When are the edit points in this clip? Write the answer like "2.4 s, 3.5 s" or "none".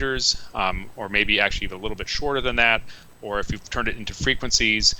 none